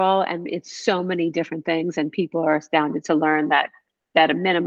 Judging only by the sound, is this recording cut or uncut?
uncut